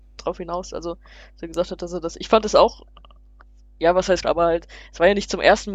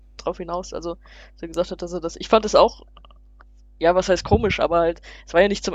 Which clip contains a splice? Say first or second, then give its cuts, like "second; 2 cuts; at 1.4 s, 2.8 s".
first; 1 cut; at 4.2 s